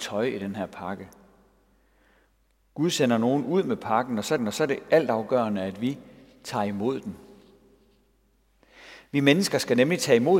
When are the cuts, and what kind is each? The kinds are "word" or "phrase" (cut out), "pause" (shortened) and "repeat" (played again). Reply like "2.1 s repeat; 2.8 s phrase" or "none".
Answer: 4.4 s repeat